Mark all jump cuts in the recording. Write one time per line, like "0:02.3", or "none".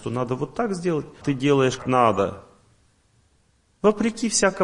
0:01.2
0:01.8